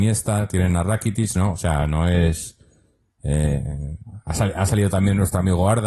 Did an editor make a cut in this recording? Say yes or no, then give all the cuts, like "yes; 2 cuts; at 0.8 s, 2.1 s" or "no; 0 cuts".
no; 0 cuts